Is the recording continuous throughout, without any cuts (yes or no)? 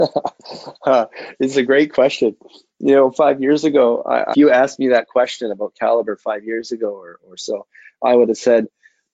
no